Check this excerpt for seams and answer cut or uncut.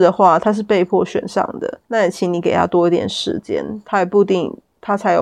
cut